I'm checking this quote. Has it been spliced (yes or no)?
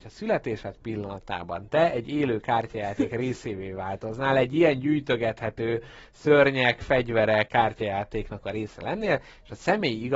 yes